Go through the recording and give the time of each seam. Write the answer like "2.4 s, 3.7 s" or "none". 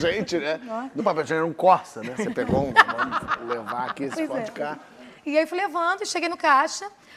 1.0 s, 5.2 s